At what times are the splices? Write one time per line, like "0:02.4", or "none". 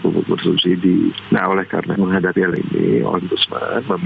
0:02.0
0:02.5